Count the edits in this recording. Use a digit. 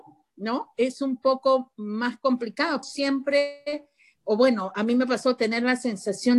1